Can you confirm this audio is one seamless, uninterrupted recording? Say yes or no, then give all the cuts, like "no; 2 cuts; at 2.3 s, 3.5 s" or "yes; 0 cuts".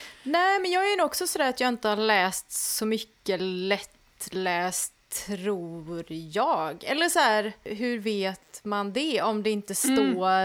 yes; 0 cuts